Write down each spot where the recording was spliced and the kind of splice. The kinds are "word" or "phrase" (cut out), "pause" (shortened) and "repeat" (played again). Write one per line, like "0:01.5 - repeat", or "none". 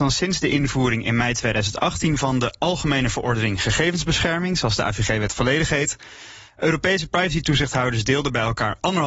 none